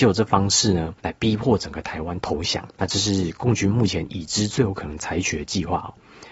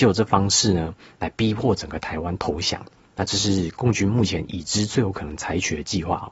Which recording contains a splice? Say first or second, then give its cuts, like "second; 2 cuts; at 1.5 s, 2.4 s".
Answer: first; 2 cuts; at 1.0 s, 2.7 s